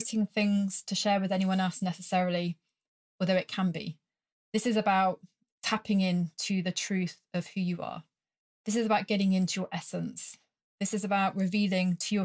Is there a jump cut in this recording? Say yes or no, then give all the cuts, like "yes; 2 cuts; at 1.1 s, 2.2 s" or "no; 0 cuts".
no; 0 cuts